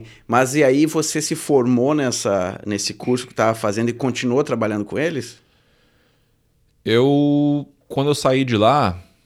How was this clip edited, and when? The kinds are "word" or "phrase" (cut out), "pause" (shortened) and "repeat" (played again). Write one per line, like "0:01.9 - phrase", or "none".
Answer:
0:07.8 - pause

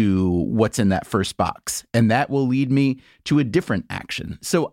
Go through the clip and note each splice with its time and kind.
none

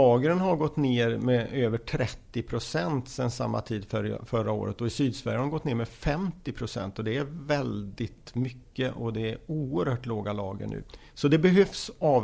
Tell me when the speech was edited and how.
none

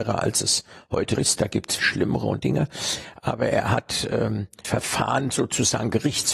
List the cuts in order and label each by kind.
0:01.1 - word
0:01.8 - word
0:02.4 - word
0:04.6 - word

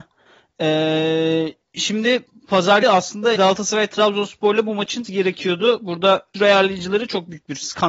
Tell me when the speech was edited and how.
0:01.6 - pause
0:02.8 - word
0:03.4 - word
0:05.0 - word
0:06.3 - word

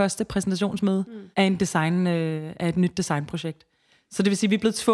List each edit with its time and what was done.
0:01.3 - pause

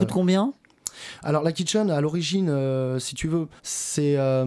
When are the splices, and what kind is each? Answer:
0:03.6 - pause

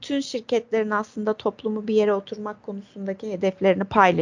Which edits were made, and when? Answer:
none

